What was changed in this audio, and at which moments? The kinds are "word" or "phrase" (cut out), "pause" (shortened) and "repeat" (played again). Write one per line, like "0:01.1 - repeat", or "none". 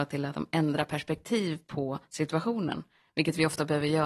none